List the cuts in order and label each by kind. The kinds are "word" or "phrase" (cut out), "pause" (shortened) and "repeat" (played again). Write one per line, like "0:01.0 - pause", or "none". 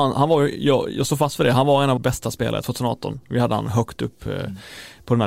0:02.0 - word